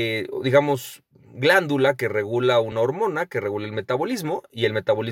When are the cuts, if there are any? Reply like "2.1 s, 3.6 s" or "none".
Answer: none

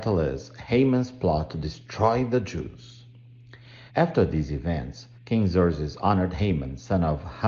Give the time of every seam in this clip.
3.9 s, 5.2 s

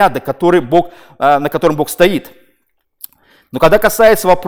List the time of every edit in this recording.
none

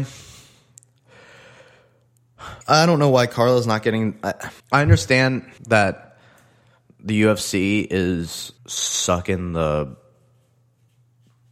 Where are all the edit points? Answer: 2.6 s, 4.6 s, 5.6 s, 8.6 s

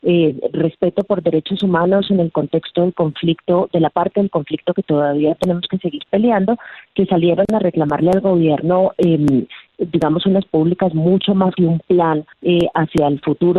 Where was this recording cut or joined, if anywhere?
9.7 s, 10.5 s, 11.6 s, 12.3 s

